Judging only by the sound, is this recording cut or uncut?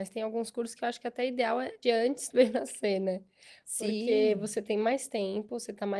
cut